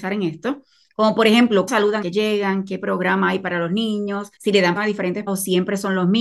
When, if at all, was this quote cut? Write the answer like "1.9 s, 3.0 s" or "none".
1.7 s, 2.0 s, 4.4 s, 4.8 s, 5.3 s